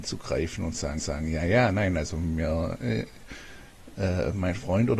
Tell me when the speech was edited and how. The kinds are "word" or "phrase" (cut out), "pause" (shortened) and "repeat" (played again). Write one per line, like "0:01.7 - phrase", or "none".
0:01.0 - repeat